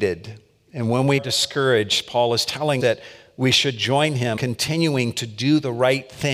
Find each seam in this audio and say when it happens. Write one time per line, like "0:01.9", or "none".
0:01.2
0:02.8
0:04.4

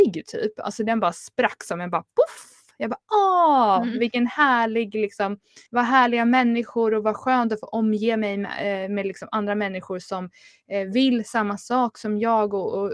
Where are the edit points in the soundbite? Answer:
0:05.7

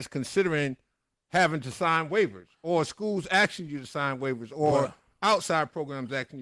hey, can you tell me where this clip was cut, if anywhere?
none

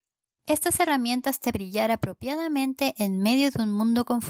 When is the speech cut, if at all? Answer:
0:01.5

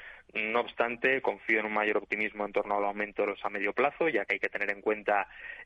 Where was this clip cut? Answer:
0:03.4

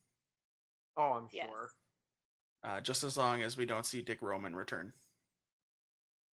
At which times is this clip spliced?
none

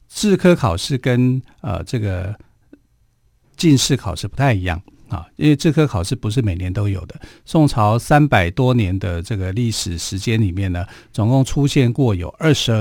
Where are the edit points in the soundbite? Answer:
none

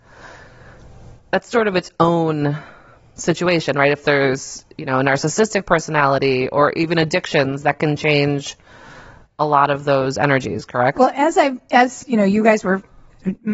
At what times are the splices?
none

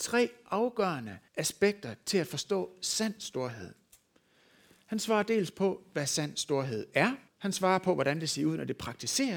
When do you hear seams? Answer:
0:01.3
0:07.3

